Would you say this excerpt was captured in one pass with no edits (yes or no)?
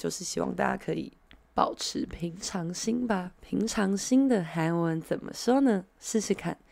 yes